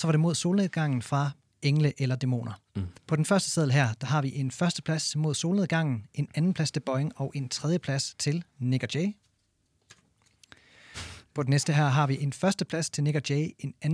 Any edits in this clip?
yes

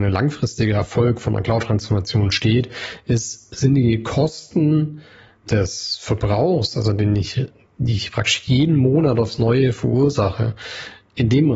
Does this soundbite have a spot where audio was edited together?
no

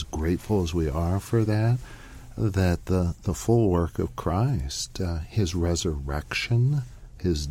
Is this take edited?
no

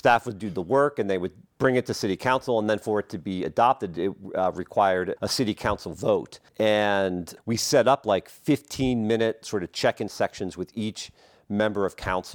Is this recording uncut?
no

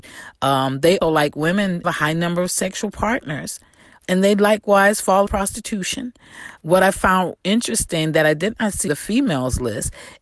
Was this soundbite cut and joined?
yes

